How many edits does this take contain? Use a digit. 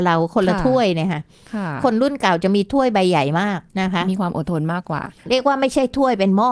2